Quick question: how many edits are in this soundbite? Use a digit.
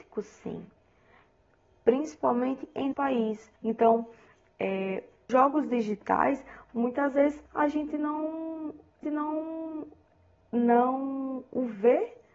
5